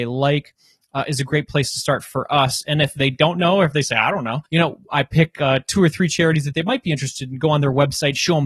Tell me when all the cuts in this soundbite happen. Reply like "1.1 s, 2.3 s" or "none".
4.5 s